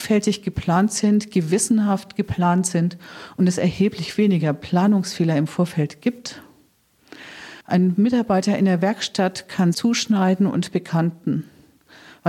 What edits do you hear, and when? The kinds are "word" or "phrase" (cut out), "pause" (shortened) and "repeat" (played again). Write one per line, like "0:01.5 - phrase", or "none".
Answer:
0:07.6 - pause
0:09.7 - phrase